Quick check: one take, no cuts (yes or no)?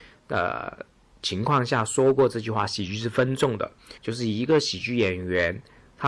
no